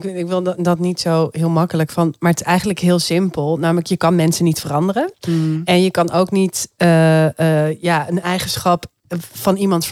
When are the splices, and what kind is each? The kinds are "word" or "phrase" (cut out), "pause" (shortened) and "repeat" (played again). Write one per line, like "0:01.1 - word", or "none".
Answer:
none